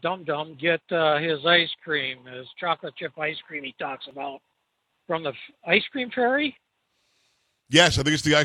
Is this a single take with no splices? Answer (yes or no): yes